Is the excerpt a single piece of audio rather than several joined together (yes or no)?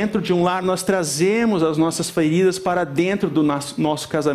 yes